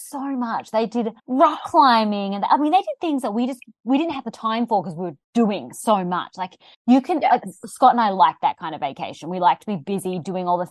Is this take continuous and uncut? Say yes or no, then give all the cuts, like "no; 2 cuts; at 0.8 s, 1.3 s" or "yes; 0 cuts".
no; 3 cuts; at 1.2 s, 5.2 s, 6.7 s